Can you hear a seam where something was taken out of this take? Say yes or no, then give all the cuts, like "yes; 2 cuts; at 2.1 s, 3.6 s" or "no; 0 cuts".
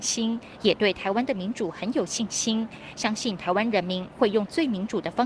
no; 0 cuts